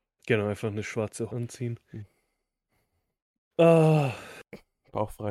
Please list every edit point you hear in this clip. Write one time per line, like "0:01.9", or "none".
0:01.3